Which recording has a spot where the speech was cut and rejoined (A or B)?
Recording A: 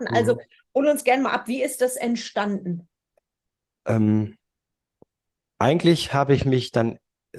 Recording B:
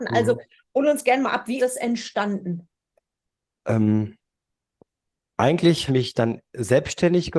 B